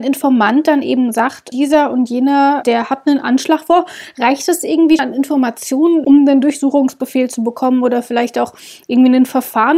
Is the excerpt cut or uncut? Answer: cut